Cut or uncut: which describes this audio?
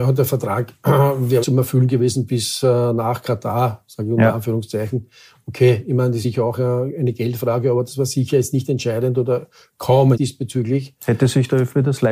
cut